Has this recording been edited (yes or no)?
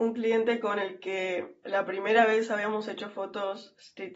no